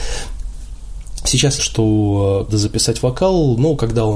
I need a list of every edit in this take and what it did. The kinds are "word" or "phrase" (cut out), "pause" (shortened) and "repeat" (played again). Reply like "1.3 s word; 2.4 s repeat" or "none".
1.6 s word; 2.5 s phrase